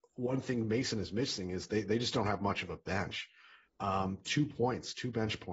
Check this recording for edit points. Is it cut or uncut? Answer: uncut